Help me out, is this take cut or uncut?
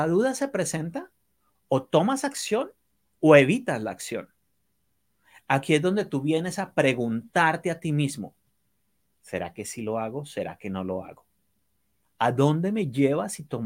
uncut